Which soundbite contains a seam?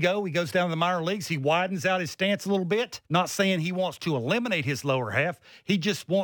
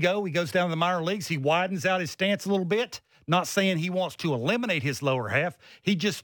first; 1 cut; at 3.0 s

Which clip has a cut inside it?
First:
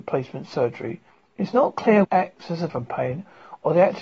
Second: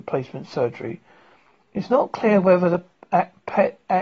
first; 3 cuts; at 1.1 s, 2.0 s, 2.7 s

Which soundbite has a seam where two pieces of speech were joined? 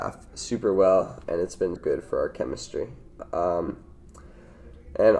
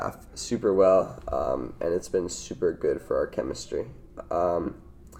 first; 2 cuts; at 1.2 s, 1.8 s

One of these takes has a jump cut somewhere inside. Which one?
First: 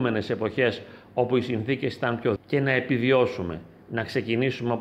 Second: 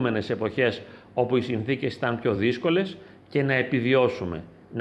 first; 1 cut; at 2.4 s

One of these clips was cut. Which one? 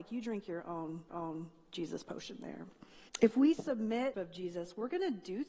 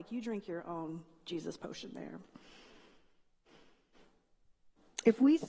first; 3 cuts; at 1.1 s, 3.1 s, 4.1 s

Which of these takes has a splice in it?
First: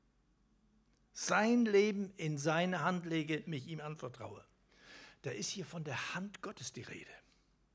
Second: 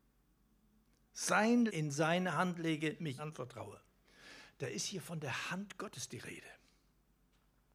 second; 2 cuts; at 1.7 s, 3.2 s

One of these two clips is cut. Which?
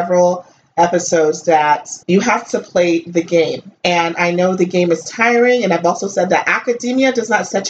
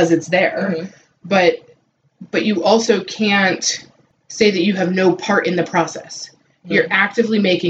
first; 2 cuts; at 2.0 s, 3.8 s

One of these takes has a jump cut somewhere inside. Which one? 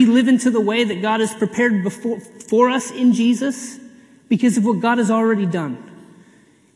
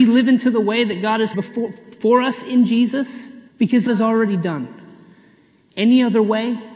second; 3 cuts; at 1.3 s, 3.5 s, 3.9 s

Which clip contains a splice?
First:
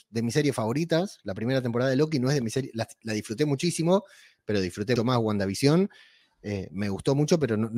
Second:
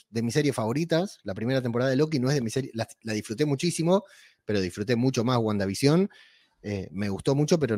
first; 1 cut; at 5.0 s

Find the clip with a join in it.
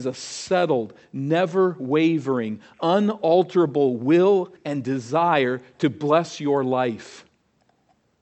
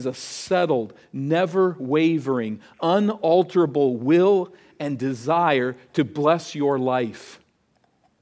first; 1 cut; at 4.6 s

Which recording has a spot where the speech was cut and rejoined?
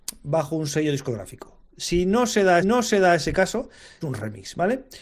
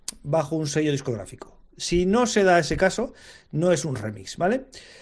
first; 2 cuts; at 2.6 s, 4.0 s

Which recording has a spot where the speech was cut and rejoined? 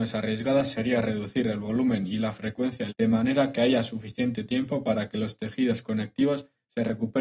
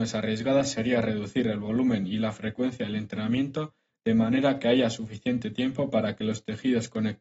first; 1 cut; at 2.9 s

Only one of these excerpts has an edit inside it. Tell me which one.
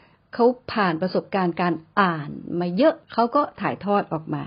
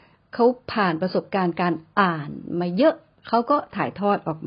first; 1 cut; at 3.0 s

